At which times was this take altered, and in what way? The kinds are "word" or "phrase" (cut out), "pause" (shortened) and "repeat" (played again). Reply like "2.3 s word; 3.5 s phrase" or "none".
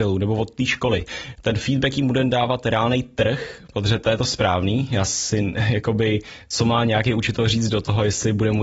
none